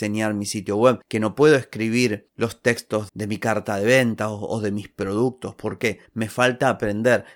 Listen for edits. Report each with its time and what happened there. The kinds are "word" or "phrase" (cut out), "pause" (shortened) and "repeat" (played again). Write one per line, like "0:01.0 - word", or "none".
0:01.0 - pause
0:03.1 - word